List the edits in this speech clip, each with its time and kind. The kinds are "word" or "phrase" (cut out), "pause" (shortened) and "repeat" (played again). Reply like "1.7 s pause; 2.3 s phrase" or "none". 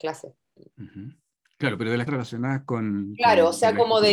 2.1 s word

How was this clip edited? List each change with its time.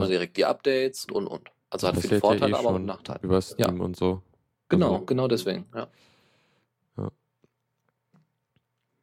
1.1 s word

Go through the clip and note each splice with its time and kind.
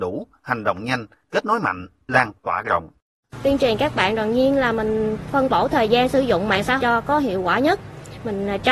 6.8 s phrase

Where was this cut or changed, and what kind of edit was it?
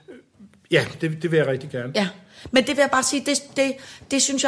none

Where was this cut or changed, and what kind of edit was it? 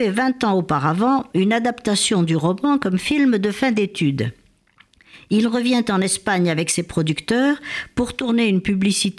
none

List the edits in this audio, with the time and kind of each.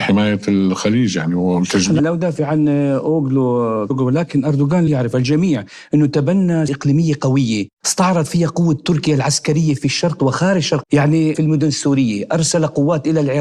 2.0 s word; 3.9 s word; 4.9 s word; 6.7 s word; 10.2 s word; 10.8 s word; 11.3 s word

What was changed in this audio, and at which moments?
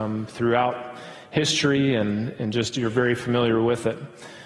none

